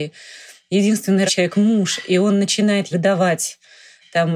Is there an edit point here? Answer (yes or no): yes